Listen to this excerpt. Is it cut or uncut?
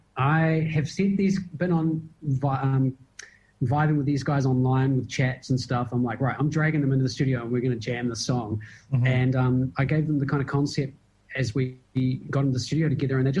uncut